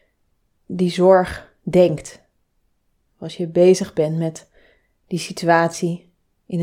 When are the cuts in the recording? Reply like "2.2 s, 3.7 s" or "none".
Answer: none